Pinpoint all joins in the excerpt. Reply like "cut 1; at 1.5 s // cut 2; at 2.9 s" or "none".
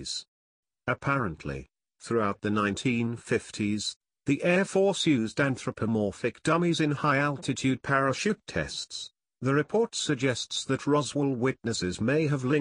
none